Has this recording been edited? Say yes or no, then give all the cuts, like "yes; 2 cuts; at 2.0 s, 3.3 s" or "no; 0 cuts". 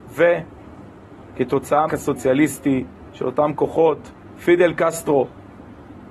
yes; 1 cut; at 1.9 s